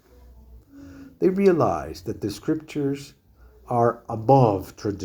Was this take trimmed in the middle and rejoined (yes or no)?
no